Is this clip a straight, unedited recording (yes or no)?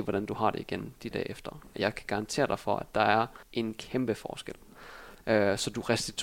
no